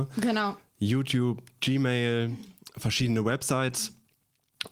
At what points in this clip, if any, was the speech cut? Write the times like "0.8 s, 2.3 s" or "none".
none